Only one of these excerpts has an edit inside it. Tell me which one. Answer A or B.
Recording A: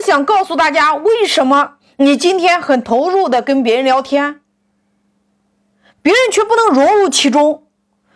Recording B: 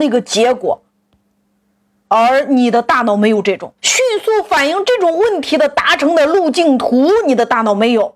B